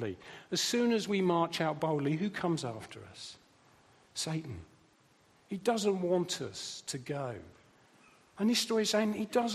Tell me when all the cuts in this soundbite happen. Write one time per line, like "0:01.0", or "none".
none

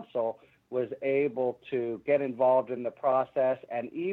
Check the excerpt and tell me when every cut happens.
none

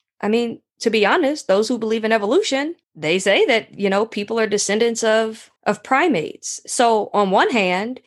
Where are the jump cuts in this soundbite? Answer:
0:02.8
0:05.6

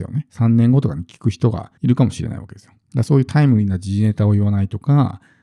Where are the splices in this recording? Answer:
0:01.8

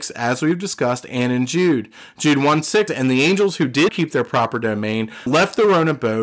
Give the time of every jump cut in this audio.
0:02.9
0:03.9
0:05.3

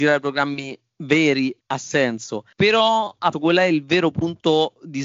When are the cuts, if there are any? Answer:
0:01.6
0:02.5
0:03.3

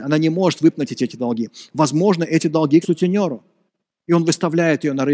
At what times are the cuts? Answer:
0:02.8

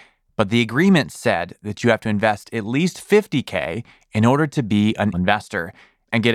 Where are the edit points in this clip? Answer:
0:05.1

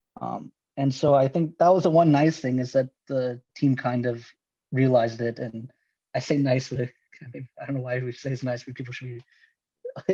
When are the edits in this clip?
none

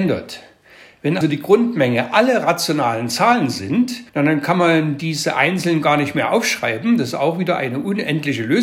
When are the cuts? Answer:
0:01.2
0:04.1

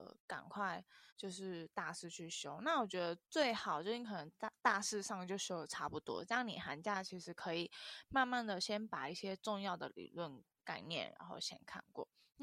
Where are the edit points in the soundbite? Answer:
0:01.1
0:03.2

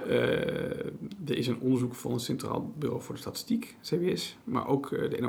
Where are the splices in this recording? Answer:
none

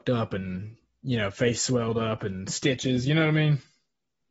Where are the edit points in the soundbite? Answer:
none

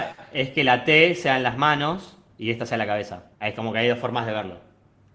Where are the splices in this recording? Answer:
0:03.3

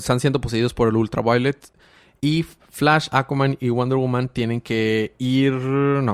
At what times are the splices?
none

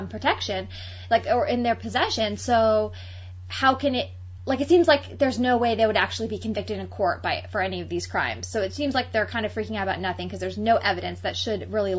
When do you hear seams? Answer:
none

